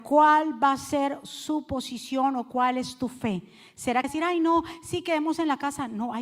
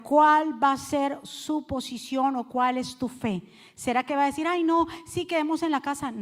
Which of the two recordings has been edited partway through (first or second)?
first